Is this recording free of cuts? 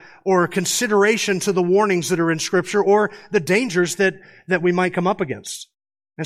yes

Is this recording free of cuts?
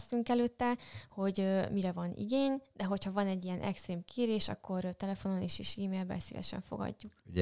yes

